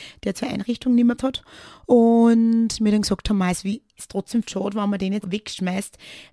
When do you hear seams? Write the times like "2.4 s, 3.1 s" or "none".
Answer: 1.2 s, 4.4 s, 5.2 s